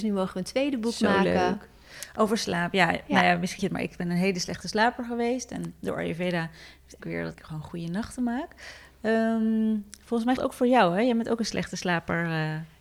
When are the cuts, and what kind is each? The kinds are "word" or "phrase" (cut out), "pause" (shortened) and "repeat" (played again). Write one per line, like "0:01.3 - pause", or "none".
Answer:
0:03.6 - word
0:07.0 - word
0:07.3 - word
0:10.4 - word